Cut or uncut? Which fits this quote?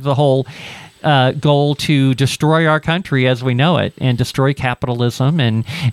uncut